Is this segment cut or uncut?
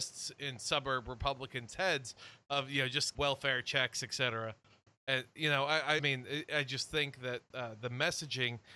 cut